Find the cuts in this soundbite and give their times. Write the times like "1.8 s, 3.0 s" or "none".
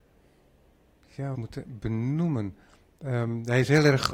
1.3 s